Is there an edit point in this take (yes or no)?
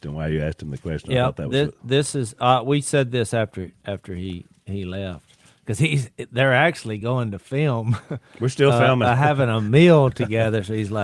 no